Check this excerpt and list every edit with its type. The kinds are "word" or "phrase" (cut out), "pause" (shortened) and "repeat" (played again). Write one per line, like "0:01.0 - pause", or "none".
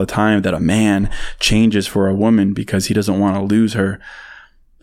none